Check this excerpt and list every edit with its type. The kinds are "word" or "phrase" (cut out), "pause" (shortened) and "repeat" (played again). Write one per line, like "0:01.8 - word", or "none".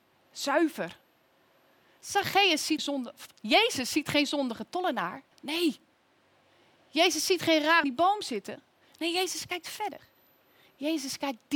0:02.8 - word
0:05.3 - pause
0:07.8 - phrase